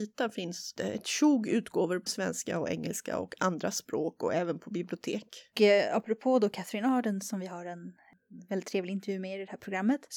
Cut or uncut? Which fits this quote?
cut